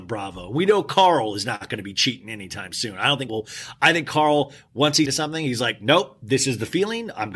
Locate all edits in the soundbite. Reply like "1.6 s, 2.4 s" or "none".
3.3 s, 5.0 s